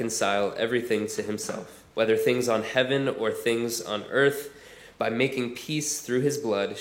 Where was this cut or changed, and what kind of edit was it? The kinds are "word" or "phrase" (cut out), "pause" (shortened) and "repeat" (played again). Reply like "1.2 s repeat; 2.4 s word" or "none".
1.9 s pause